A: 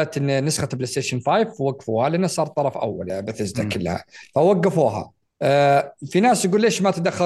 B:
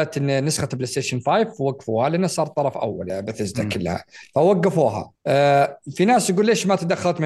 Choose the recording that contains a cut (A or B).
B